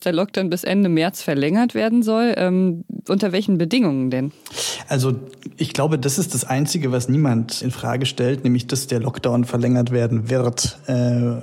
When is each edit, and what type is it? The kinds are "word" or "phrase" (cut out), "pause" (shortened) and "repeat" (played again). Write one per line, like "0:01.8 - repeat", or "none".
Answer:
0:07.6 - word